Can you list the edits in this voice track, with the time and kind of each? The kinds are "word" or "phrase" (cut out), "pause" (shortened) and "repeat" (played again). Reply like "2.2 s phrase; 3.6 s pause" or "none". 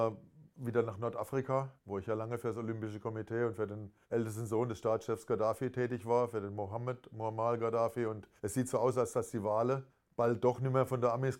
1.8 s pause; 4.0 s pause; 8.4 s pause; 9.9 s pause